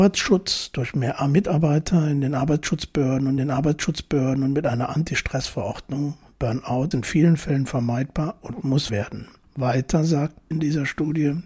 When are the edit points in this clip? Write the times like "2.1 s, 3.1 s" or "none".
3.4 s, 6.9 s, 8.9 s, 9.4 s, 10.5 s